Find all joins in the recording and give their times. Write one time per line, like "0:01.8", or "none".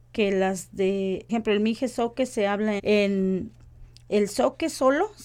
0:01.3
0:02.8